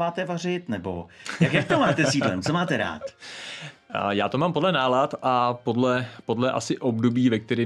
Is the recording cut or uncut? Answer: uncut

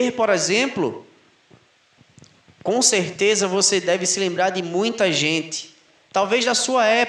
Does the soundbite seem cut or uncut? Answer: uncut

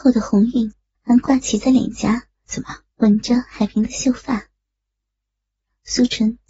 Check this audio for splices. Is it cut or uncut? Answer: cut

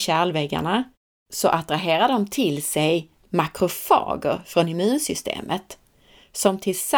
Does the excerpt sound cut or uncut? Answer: uncut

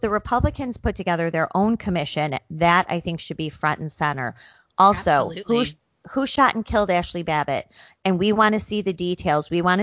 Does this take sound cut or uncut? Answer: uncut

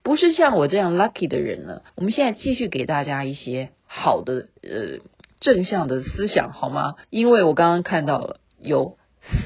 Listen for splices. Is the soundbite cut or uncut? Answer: cut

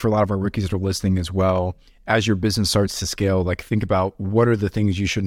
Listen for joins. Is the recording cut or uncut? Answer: uncut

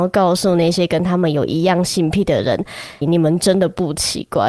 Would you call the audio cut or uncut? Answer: cut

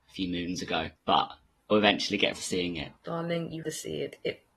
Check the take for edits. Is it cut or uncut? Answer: cut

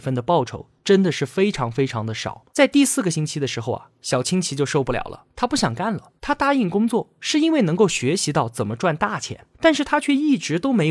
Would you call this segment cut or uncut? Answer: cut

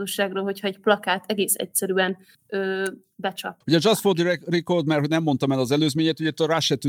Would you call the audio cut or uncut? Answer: cut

